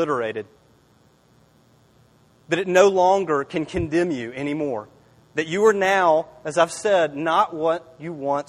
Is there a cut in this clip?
no; 0 cuts

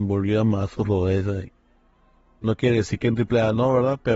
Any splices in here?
no; 0 cuts

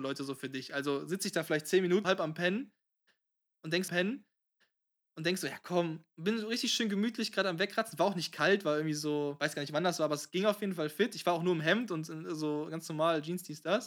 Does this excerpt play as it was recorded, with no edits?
no; 2 cuts; at 2.0 s, 3.9 s

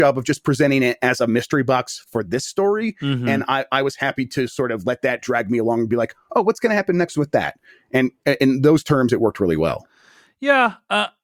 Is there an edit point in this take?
no; 0 cuts

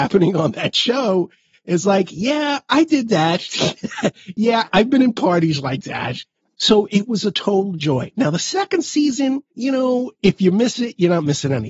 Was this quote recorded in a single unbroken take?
yes; 0 cuts

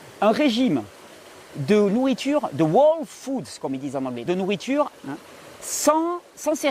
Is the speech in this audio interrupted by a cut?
yes; 2 cuts; at 4.3 s, 5.0 s

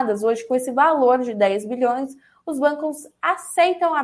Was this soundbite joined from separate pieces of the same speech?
no; 0 cuts

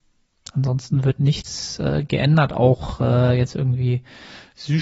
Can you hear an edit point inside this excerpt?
no; 0 cuts

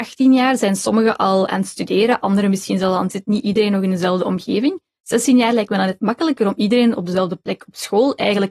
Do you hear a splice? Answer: yes; 1 cut; at 3.1 s

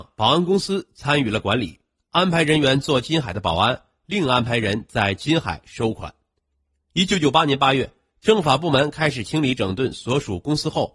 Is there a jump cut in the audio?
no; 0 cuts

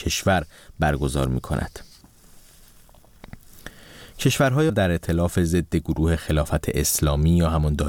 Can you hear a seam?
yes; 1 cut; at 4.7 s

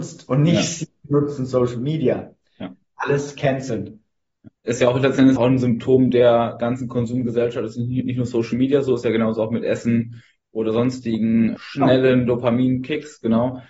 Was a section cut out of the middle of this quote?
yes; 3 cuts; at 4.6 s, 5.4 s, 11.6 s

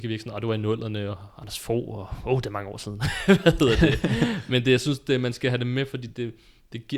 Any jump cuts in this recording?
no; 0 cuts

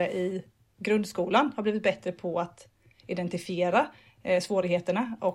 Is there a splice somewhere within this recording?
no; 0 cuts

